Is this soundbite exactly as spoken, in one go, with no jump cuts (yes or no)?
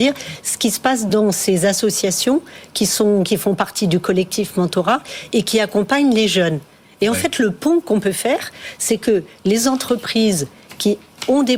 yes